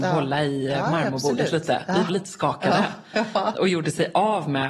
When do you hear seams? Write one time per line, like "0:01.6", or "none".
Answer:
0:02.1
0:03.5

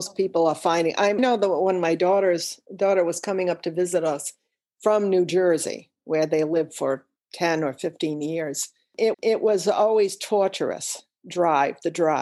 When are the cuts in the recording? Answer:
0:01.2
0:02.7
0:09.1

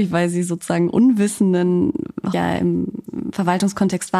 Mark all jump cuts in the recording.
0:02.3

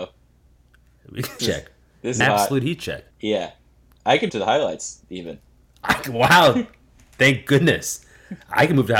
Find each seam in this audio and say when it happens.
0:01.4
0:02.2
0:03.1
0:04.3

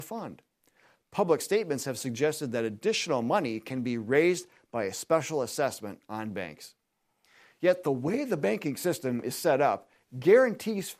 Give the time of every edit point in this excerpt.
none

